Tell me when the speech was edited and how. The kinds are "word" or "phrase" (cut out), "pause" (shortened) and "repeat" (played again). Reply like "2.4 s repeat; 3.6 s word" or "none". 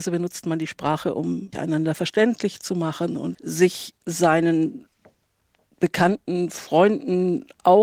1.5 s word; 3.3 s word